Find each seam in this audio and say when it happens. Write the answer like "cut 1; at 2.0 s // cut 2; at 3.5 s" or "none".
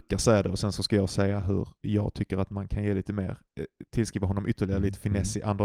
cut 1; at 1.8 s